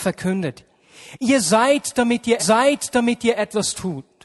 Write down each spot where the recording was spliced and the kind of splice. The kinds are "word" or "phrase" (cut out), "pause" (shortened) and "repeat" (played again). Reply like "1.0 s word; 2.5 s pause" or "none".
2.4 s repeat